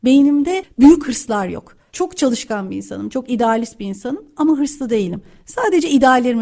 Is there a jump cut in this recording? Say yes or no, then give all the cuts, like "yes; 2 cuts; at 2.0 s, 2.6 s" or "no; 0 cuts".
no; 0 cuts